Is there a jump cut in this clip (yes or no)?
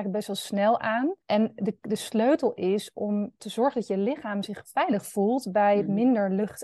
yes